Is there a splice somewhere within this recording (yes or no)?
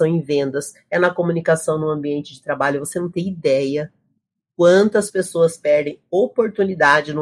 no